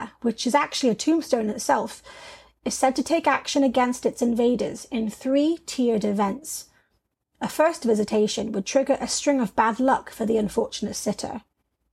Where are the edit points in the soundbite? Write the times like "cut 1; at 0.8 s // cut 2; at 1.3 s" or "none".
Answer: none